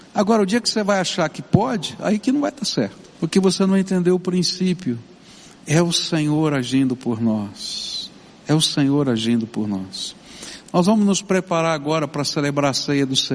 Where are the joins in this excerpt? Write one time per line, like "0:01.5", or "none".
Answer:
0:03.1